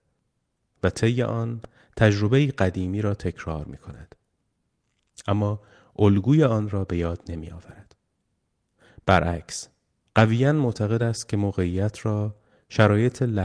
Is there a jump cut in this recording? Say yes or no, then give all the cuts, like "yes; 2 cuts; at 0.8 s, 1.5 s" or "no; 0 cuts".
no; 0 cuts